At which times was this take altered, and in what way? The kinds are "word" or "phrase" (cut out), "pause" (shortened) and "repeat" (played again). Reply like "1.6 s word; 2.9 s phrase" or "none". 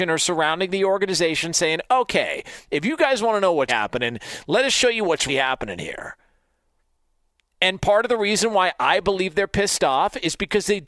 3.7 s word; 5.3 s word